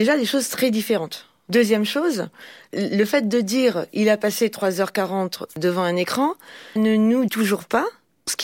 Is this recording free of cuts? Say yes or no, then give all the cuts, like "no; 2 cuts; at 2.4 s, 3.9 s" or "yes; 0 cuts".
no; 2 cuts; at 6.8 s, 7.3 s